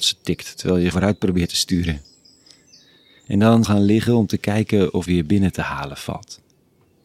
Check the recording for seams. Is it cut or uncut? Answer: cut